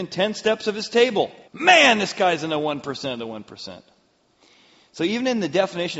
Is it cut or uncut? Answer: cut